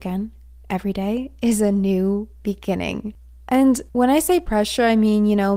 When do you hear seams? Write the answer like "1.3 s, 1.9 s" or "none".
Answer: 3.9 s